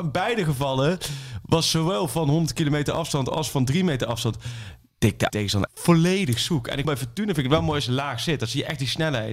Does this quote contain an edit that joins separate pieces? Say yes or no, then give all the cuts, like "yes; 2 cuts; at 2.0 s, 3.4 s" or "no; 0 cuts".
yes; 3 cuts; at 5.3 s, 5.7 s, 6.8 s